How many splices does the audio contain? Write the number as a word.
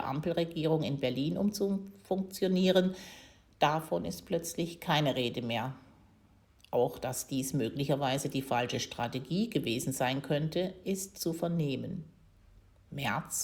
one